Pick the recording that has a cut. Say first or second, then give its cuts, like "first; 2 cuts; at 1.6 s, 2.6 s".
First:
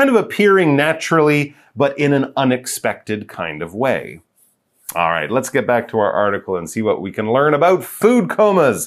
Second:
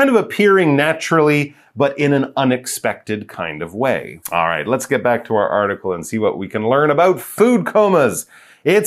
second; 1 cut; at 4.2 s